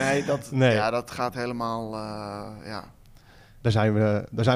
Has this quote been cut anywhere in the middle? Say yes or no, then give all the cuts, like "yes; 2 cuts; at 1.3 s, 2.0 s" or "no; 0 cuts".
yes; 1 cut; at 1.3 s